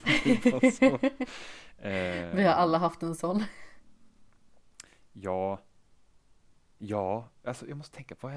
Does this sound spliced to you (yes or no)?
no